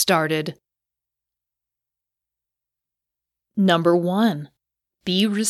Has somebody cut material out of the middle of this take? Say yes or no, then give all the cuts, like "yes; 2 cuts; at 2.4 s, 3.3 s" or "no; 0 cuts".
no; 0 cuts